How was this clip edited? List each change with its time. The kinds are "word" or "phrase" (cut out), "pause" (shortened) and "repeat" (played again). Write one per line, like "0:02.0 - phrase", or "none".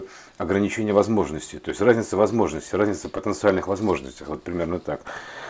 none